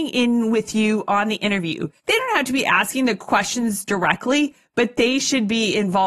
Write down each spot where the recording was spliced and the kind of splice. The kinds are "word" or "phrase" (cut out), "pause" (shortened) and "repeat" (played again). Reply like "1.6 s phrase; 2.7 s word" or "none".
2.0 s pause